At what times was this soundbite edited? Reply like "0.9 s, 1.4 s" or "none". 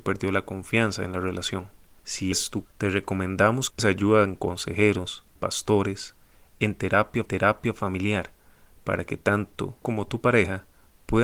2.3 s, 2.6 s, 3.8 s, 5.4 s, 7.3 s, 9.8 s